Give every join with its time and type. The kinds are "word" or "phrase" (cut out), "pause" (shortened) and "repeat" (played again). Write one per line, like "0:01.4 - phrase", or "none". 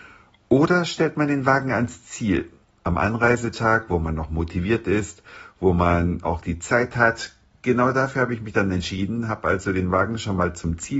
none